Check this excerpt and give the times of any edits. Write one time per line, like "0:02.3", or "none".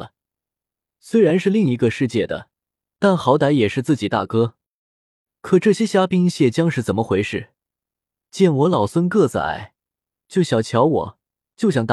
none